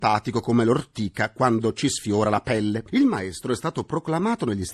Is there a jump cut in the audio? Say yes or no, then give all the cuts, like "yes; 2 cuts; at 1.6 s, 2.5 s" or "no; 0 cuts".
no; 0 cuts